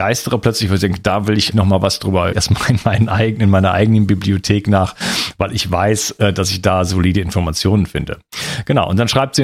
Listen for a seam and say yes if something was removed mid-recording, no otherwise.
yes